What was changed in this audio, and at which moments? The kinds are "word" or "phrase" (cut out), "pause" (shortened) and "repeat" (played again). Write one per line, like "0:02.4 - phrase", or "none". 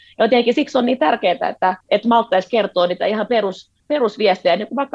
0:01.8 - pause
0:03.8 - pause